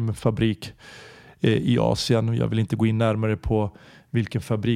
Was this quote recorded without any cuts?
yes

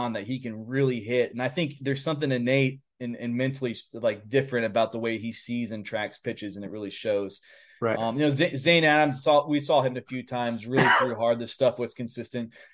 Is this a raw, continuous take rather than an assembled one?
yes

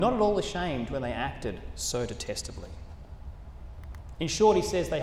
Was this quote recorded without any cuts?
yes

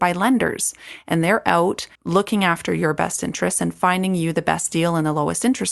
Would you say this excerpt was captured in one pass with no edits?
no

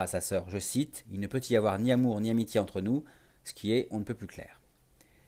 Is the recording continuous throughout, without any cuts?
yes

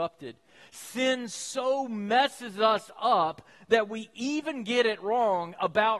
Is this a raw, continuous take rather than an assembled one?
yes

